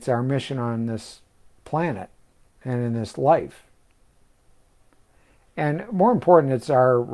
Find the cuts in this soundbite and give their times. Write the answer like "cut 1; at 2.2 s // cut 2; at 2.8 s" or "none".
none